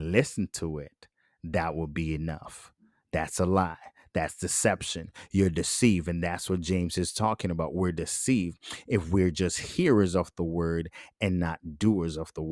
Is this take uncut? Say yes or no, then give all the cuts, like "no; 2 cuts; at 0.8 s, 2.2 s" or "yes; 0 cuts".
yes; 0 cuts